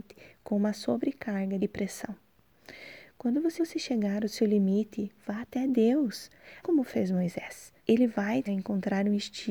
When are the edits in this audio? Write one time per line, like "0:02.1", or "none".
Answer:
0:01.6
0:03.6
0:06.6
0:07.8
0:08.5